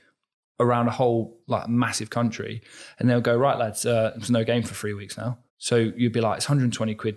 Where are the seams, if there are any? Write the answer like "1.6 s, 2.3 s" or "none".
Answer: 1.4 s, 5.5 s